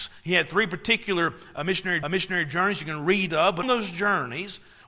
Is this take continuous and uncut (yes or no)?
no